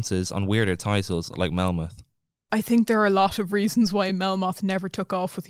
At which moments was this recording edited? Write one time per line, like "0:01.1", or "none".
none